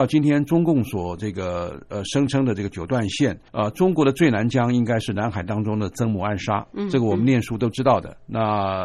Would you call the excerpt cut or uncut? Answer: cut